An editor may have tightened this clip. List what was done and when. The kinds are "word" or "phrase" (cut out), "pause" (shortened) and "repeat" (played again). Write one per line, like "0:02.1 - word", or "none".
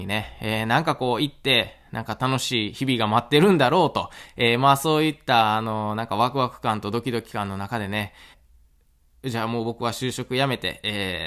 0:08.3 - word